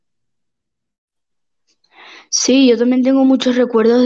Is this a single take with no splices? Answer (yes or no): yes